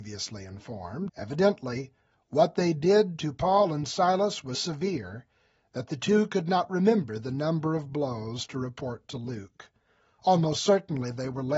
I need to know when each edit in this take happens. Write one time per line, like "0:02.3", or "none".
0:01.1
0:04.5